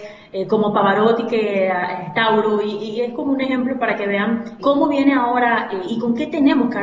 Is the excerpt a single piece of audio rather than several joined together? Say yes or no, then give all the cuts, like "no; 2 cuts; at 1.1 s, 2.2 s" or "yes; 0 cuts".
no; 1 cut; at 4.6 s